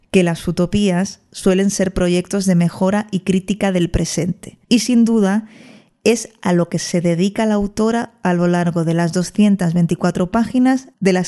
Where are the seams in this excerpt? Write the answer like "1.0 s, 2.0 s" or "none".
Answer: 4.6 s

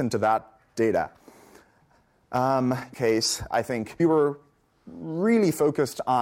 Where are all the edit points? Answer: 2.9 s, 3.5 s, 4.0 s

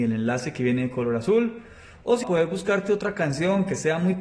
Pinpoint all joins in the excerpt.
2.2 s

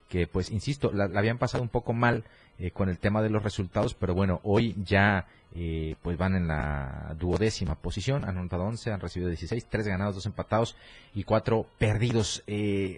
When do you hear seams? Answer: none

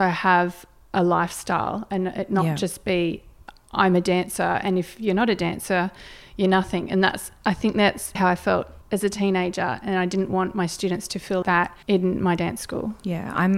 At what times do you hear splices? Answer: 8.2 s, 8.8 s, 11.4 s, 11.8 s

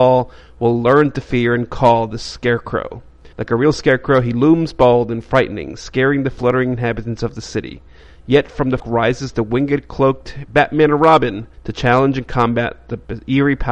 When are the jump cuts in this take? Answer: 3.3 s, 8.8 s, 11.5 s

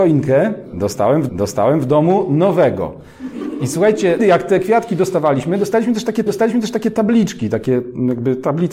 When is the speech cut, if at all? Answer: 1.3 s, 4.2 s, 6.3 s

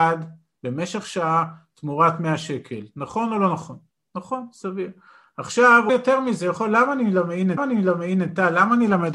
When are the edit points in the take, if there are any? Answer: 3.9 s, 5.9 s, 7.6 s

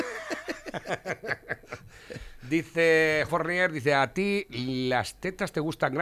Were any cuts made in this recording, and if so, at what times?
3.3 s

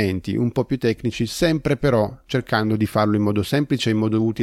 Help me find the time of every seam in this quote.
none

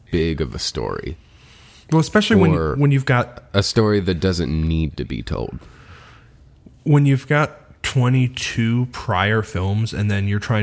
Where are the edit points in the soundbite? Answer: none

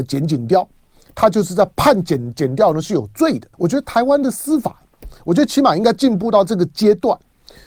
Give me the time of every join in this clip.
3.5 s

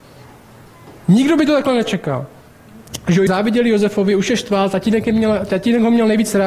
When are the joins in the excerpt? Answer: 1.0 s, 3.3 s

